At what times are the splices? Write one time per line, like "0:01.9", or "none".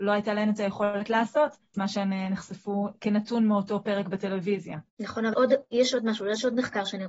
0:01.7
0:04.9
0:05.3